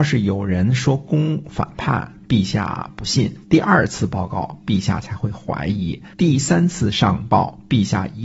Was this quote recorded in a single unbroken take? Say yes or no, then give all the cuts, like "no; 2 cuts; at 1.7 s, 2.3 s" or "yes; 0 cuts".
no; 2 cuts; at 3.4 s, 6.1 s